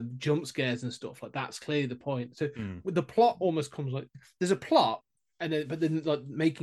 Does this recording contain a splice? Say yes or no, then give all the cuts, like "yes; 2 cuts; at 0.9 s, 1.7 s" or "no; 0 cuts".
no; 0 cuts